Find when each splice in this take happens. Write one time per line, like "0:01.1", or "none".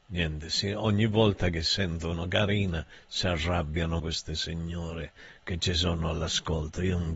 0:04.0